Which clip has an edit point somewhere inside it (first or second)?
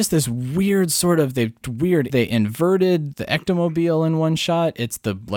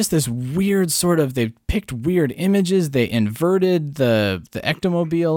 first